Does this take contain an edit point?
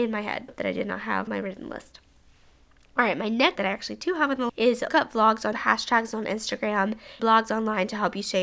yes; 6 cuts; at 1.3 s, 3.6 s, 4.5 s, 4.9 s, 5.5 s, 7.2 s

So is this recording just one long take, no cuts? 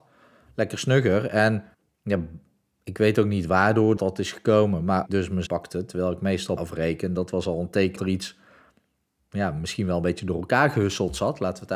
no; 6 cuts; at 1.7 s, 4.0 s, 5.1 s, 5.5 s, 6.6 s, 8.0 s

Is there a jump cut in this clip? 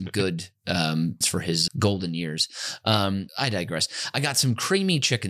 yes; 3 cuts; at 1.2 s, 1.7 s, 3.3 s

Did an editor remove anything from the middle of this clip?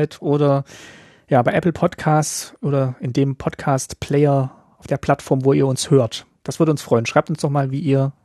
no; 0 cuts

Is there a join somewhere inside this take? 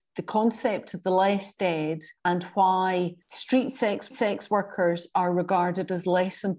yes; 3 cuts; at 2.2 s, 3.2 s, 4.1 s

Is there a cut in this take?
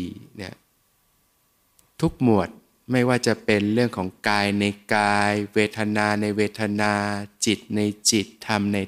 yes; 1 cut; at 1.0 s

